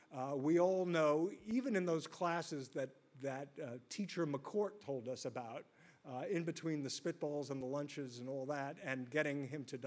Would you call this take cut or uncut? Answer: uncut